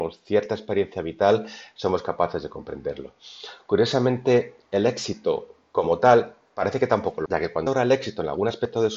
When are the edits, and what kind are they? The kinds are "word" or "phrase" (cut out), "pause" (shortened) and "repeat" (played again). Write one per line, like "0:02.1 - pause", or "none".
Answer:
0:07.3 - word
0:07.7 - word

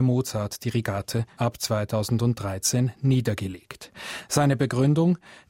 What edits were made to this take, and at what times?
0:01.4 - phrase

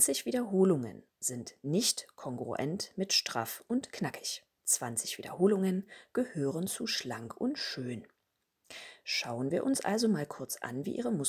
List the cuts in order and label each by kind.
0:04.6 - pause

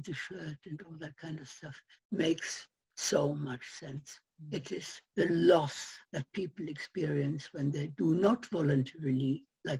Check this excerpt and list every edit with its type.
0:02.0 - pause
0:05.1 - pause
0:06.0 - pause

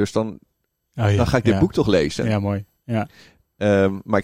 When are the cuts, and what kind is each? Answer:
none

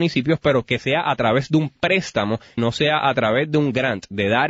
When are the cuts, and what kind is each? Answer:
0:02.6 - word

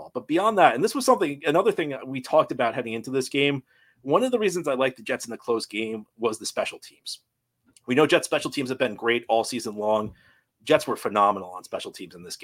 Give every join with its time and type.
none

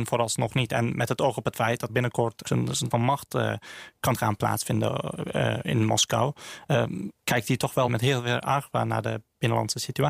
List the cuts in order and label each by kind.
0:01.9 - word
0:02.4 - phrase
0:02.9 - word
0:07.9 - word

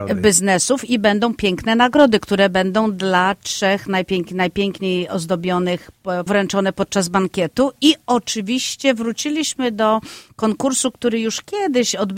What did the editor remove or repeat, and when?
0:06.3 - phrase

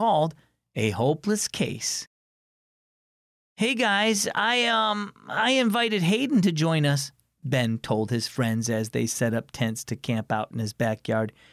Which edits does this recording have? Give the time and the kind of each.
none

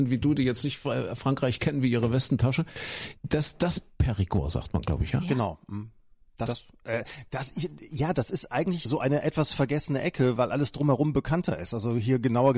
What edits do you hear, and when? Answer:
0:06.5 - phrase
0:08.9 - word
0:10.4 - word

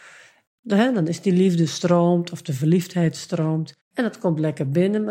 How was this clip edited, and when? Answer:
0:03.8 - pause

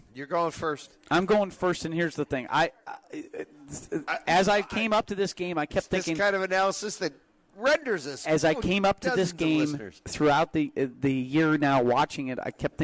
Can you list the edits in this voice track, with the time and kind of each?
0:10.0 - pause

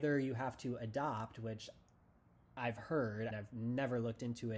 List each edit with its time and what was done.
0:03.3 - word

